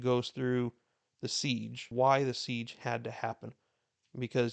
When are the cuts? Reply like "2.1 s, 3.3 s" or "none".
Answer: 1.9 s